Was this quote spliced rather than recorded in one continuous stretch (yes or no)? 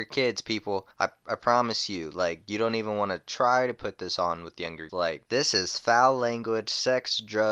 yes